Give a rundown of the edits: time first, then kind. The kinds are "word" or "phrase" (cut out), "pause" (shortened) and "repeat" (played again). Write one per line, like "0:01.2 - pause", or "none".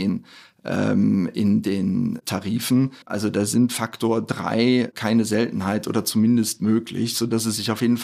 0:03.0 - pause

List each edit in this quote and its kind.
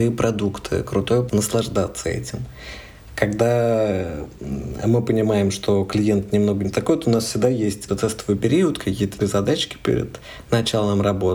0:01.3 - word
0:07.9 - word
0:09.2 - word

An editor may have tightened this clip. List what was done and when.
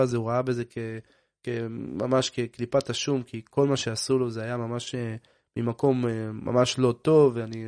none

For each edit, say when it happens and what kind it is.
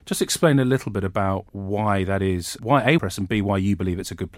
0:01.5 - pause
0:02.6 - word
0:03.0 - phrase

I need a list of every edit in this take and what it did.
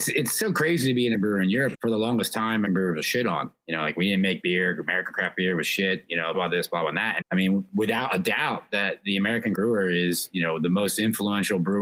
0:01.1 - word
0:01.7 - word
0:02.7 - word
0:06.3 - word
0:07.2 - word
0:09.5 - word

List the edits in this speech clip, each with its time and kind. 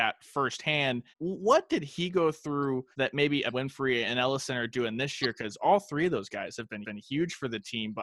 0:01.1 - pause
0:02.9 - pause
0:03.5 - word
0:06.8 - repeat

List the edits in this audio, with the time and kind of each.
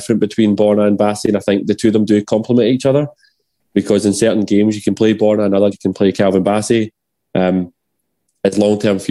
0:05.7 - word

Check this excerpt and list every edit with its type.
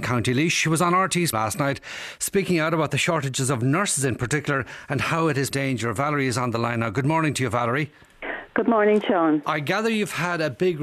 0:01.3 - word
0:05.5 - phrase

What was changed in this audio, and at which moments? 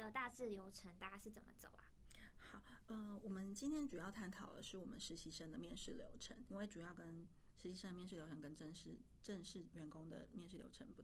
0:06.5 - word

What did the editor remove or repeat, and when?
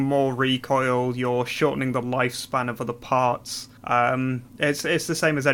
0:03.8 - pause

